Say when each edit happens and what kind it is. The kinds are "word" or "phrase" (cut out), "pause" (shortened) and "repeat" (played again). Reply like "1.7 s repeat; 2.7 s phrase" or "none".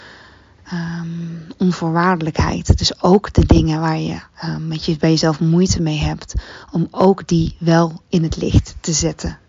none